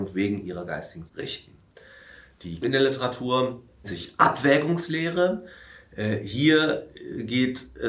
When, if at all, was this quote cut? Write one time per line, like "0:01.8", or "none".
0:01.1
0:02.6
0:03.8